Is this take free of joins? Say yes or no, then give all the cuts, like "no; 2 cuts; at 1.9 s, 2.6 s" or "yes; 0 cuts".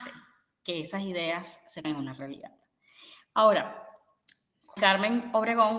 no; 2 cuts; at 1.8 s, 4.8 s